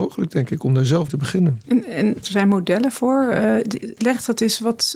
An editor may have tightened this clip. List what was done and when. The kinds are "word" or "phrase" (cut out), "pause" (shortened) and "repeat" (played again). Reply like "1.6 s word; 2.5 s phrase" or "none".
1.1 s word; 2.2 s phrase